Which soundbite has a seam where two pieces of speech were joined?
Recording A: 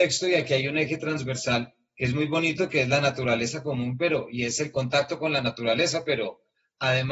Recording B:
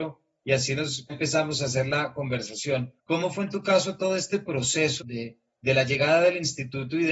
B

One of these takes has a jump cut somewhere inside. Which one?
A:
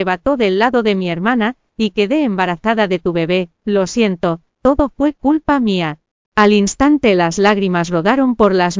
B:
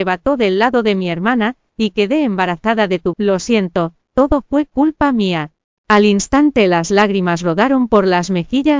B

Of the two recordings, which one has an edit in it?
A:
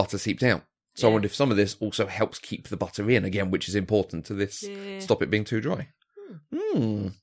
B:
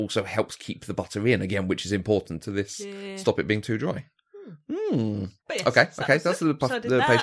B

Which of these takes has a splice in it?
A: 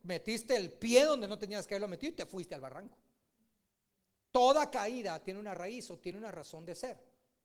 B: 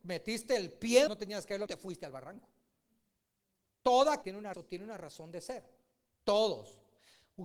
B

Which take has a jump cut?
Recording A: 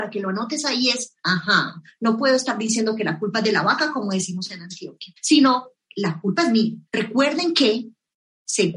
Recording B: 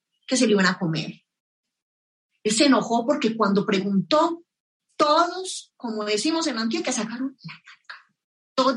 A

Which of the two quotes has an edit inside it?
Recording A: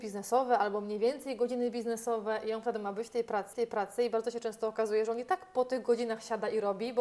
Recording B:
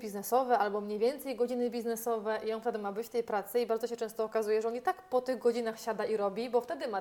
A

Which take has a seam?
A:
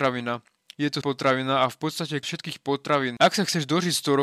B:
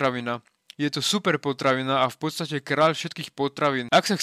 A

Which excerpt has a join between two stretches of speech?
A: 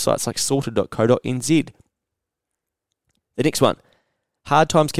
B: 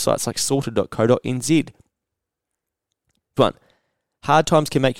B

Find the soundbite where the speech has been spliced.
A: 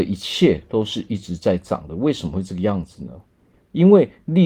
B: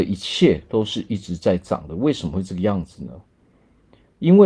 A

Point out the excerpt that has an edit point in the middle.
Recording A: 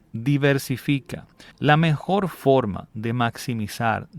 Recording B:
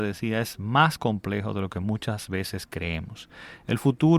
A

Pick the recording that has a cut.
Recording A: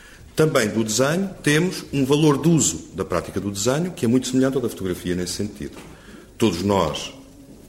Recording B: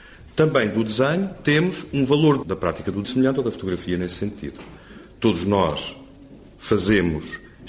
B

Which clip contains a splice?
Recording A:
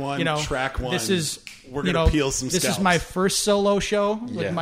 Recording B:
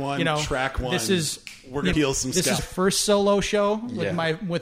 B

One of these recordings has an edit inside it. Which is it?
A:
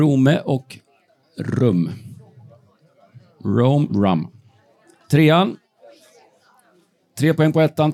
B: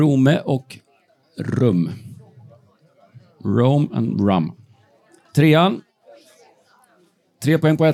A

